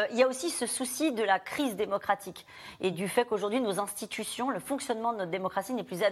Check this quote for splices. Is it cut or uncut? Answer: uncut